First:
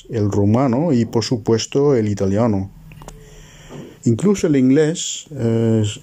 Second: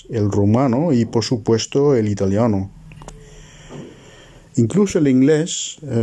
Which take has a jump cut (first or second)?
first